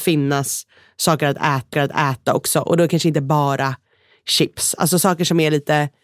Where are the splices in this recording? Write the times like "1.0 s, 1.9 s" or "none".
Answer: 1.7 s

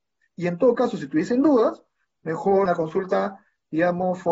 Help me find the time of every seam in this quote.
2.7 s

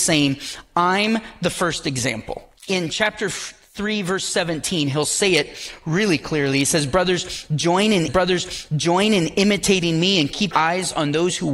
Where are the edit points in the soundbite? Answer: 2.6 s, 8.1 s, 10.5 s

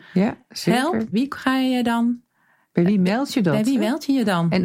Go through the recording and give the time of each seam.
1.1 s

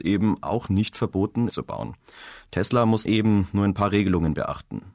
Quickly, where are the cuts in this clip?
1.5 s, 3.1 s

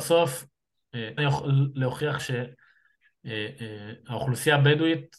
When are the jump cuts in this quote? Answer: 1.2 s, 2.2 s

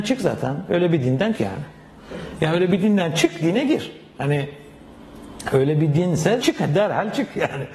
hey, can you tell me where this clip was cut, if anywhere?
1.3 s, 3.4 s, 6.4 s

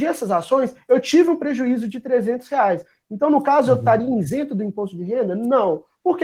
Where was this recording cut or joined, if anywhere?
none

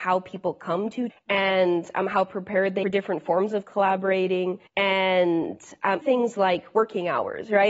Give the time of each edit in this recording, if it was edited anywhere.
1.1 s, 2.8 s, 4.7 s, 6.0 s

